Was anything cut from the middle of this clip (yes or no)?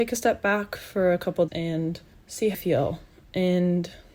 yes